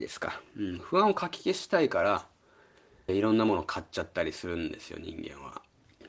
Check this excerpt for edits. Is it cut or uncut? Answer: cut